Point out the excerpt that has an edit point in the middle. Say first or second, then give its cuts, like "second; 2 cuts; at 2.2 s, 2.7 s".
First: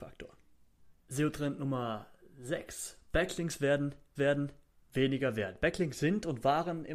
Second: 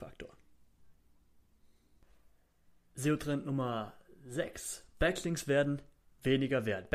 first; 2 cuts; at 1.0 s, 4.2 s